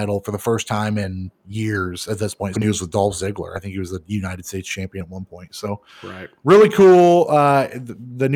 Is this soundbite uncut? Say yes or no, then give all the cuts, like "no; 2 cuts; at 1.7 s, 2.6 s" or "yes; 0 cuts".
no; 3 cuts; at 1.4 s, 2.5 s, 6.4 s